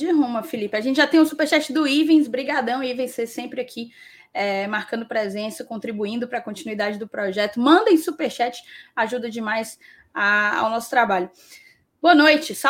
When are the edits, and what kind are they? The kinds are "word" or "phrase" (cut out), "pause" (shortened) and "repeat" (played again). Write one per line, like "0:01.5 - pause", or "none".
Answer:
none